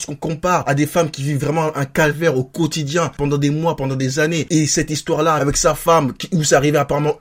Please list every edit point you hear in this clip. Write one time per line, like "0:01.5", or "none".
none